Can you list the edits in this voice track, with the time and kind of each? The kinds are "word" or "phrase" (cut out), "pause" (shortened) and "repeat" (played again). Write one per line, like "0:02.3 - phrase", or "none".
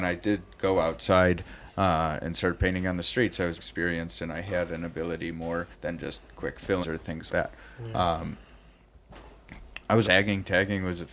0:03.6 - word
0:05.7 - pause
0:06.8 - word
0:07.3 - word
0:10.0 - word